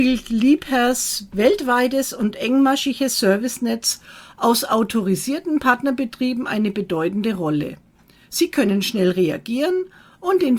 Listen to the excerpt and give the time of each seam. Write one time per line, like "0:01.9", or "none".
none